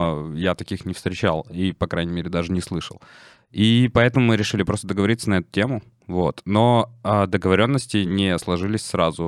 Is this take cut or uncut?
uncut